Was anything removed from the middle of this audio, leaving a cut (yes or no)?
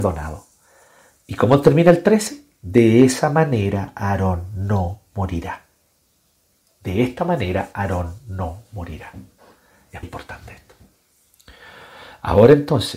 yes